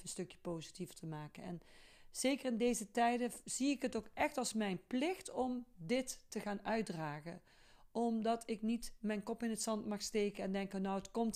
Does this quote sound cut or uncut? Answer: uncut